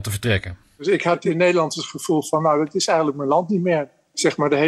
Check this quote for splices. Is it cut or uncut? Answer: uncut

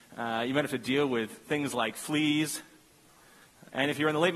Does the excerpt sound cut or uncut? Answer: uncut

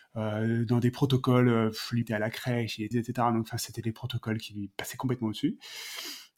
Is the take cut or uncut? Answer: cut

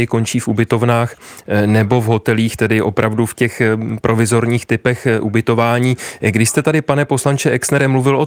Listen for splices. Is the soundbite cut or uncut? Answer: uncut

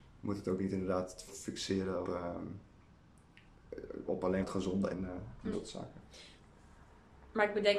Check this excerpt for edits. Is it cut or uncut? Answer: cut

